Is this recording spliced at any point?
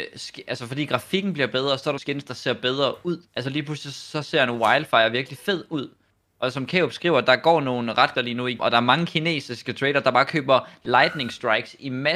yes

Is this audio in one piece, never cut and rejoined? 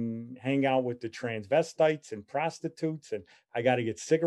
yes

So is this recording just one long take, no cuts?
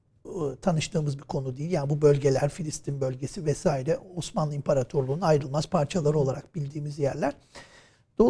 yes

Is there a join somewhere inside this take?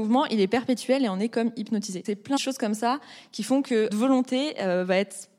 yes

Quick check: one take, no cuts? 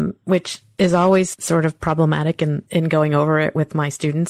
no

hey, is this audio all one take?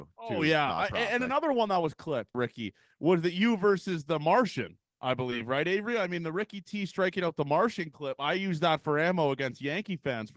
no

